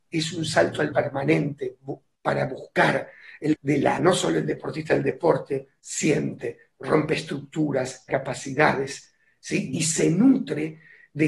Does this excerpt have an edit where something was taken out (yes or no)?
yes